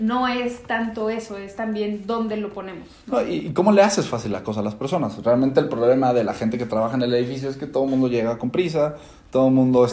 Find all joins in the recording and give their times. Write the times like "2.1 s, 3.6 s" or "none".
none